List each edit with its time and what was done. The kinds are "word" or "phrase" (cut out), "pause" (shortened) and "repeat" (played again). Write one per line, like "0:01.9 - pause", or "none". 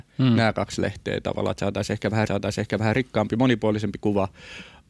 0:02.3 - repeat